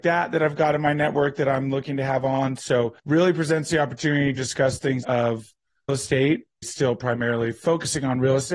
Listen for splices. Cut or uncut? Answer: cut